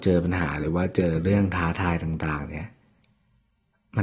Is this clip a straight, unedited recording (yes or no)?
yes